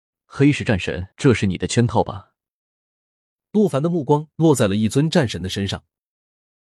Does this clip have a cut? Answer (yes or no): yes